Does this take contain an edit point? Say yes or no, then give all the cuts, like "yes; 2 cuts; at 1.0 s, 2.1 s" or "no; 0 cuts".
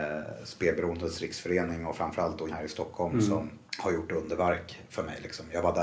yes; 2 cuts; at 2.5 s, 3.7 s